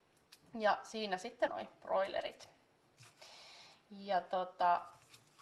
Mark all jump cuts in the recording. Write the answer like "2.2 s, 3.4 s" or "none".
1.5 s

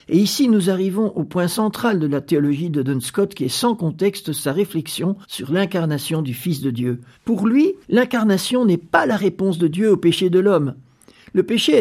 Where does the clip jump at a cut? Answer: 5.2 s, 7.1 s, 7.8 s

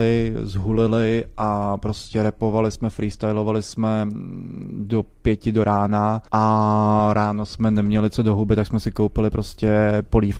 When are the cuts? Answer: 6.2 s

